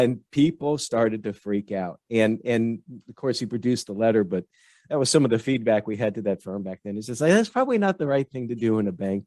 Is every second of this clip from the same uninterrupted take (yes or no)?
yes